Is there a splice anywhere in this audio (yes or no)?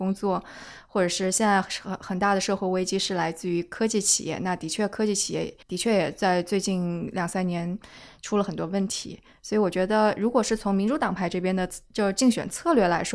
yes